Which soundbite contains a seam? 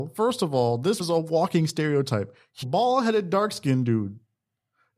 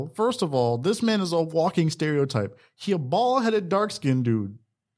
first; 2 cuts; at 1.0 s, 2.6 s

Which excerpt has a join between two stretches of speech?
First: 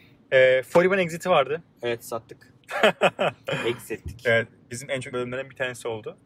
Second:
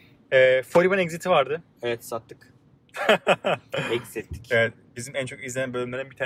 first; 2 cuts; at 2.6 s, 5.1 s

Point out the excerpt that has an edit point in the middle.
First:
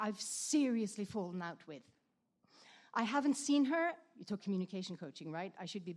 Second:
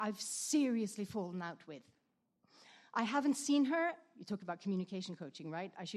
first; 1 cut; at 4.4 s

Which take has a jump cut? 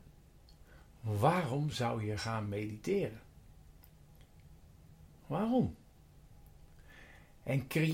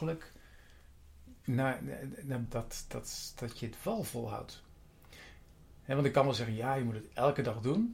second; 2 cuts; at 1.4 s, 2.4 s

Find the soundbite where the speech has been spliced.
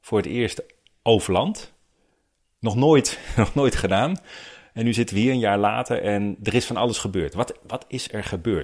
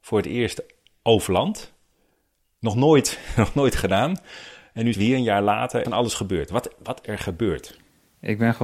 second; 3 cuts; at 4.9 s, 5.8 s, 7.0 s

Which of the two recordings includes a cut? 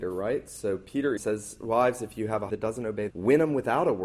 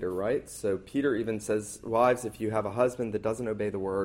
first; 3 cuts; at 1.2 s, 2.5 s, 3.1 s

